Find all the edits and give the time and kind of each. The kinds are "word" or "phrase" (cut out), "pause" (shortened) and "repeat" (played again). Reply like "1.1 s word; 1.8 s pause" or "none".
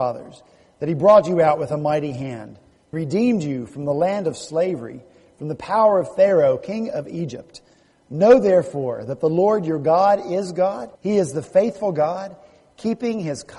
2.9 s word; 11.0 s pause